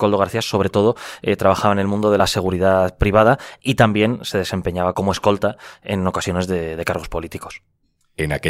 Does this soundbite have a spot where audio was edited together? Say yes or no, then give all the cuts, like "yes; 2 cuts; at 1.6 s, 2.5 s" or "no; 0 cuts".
no; 0 cuts